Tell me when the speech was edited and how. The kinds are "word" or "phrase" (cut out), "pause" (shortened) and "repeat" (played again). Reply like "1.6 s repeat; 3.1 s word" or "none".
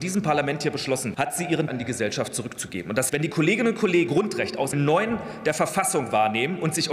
1.1 s word; 1.7 s word; 3.1 s word; 4.1 s word; 4.7 s word